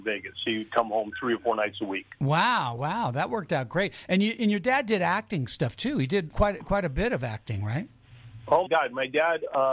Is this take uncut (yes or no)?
no